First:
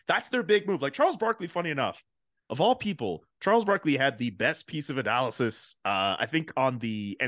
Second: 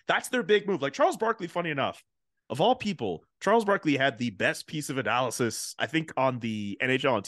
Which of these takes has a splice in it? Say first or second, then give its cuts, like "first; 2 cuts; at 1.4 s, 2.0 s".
second; 1 cut; at 5.8 s